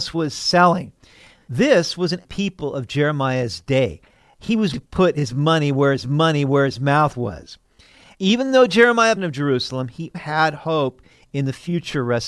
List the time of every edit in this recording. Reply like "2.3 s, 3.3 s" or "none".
2.2 s, 4.7 s, 6.0 s, 9.2 s, 10.1 s